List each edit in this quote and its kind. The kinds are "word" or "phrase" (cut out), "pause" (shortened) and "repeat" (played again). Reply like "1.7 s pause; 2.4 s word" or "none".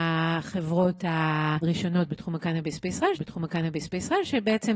3.2 s repeat

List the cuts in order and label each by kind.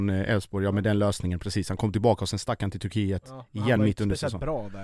none

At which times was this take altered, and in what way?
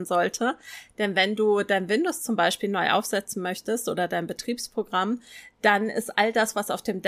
none

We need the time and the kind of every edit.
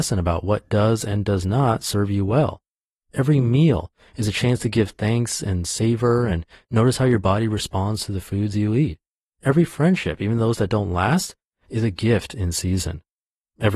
none

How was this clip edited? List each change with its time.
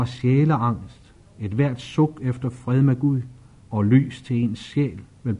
none

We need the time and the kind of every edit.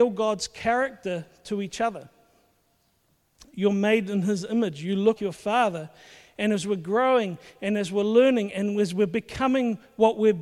5.2 s word

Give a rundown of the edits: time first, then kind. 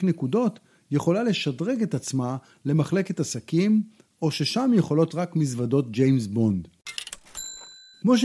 5.1 s word

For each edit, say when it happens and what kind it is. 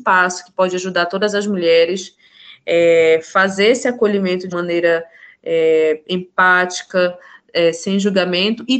4.5 s word

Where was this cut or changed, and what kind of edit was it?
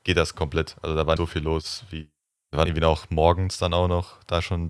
1.2 s word; 2.3 s pause; 2.7 s word

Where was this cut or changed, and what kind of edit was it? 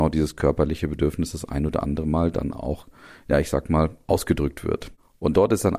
none

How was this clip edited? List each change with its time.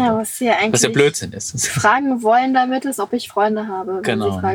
none

